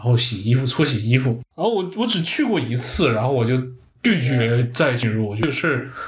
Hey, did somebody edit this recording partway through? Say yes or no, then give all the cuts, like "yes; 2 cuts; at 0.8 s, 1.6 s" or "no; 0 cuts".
yes; 1 cut; at 1.5 s